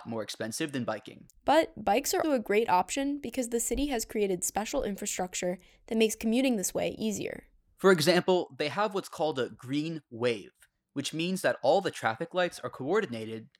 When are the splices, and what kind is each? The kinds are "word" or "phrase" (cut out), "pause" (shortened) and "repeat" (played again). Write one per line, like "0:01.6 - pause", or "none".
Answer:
0:02.2 - word